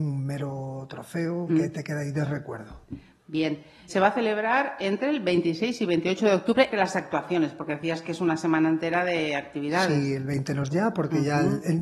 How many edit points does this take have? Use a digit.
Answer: 4